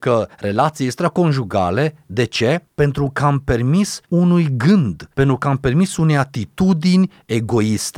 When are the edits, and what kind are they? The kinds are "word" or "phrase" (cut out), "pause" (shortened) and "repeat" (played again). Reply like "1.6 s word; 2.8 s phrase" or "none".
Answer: 4.0 s pause